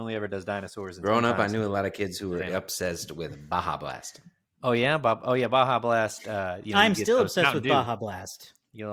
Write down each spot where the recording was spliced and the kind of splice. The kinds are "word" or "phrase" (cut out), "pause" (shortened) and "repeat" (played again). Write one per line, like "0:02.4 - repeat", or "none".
none